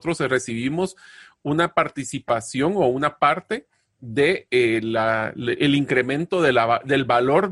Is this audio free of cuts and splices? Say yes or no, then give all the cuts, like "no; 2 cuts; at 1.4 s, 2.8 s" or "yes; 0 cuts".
yes; 0 cuts